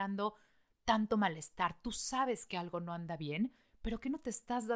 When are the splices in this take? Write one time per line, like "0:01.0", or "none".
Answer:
none